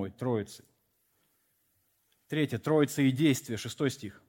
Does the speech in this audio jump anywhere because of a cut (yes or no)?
no